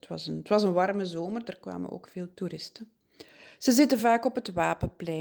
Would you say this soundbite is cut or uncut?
uncut